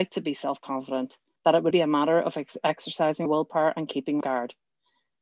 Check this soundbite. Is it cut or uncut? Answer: cut